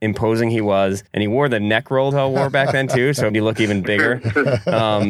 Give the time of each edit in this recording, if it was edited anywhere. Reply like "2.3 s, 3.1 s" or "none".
1.1 s, 2.1 s, 3.3 s